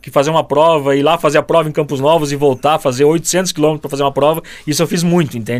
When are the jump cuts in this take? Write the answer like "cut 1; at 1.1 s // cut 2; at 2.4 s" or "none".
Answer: none